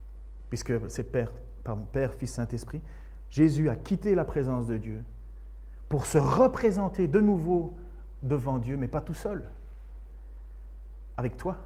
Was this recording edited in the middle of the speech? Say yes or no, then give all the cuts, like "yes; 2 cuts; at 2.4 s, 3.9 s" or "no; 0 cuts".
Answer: no; 0 cuts